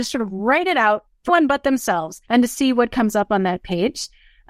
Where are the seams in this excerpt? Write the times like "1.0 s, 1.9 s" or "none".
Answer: 1.3 s, 2.3 s